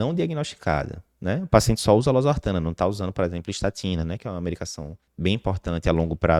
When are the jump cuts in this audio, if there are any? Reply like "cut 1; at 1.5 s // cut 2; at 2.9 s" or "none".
cut 1; at 5.1 s